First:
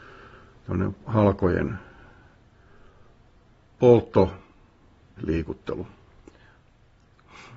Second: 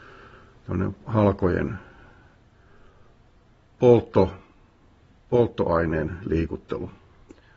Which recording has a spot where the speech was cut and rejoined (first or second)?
first